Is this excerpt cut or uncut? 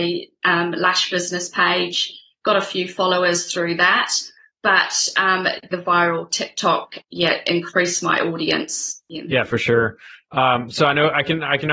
cut